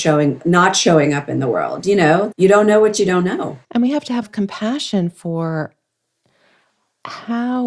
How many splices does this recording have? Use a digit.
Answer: 3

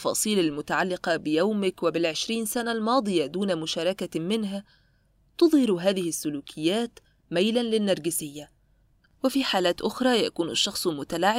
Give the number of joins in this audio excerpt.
0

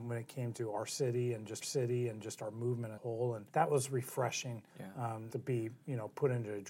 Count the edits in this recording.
5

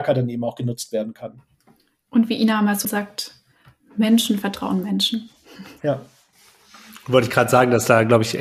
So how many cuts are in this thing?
1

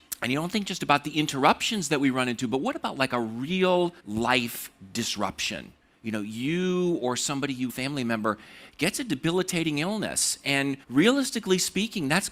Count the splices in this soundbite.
4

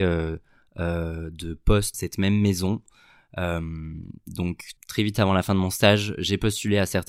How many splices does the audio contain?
2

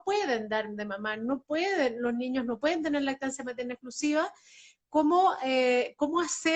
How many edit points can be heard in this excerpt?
0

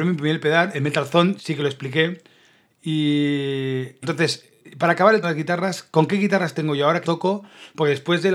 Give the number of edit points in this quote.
4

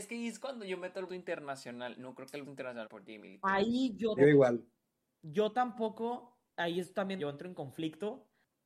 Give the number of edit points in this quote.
5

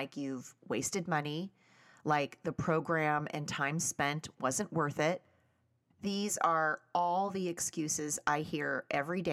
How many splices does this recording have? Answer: 0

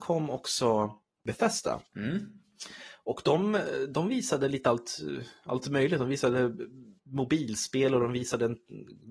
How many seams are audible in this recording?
2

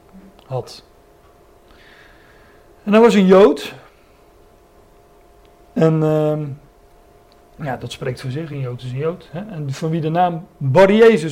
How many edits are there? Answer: 0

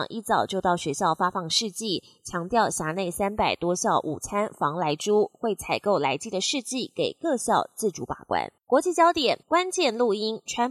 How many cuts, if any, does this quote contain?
2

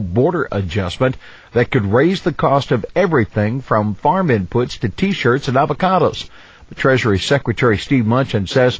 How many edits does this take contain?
0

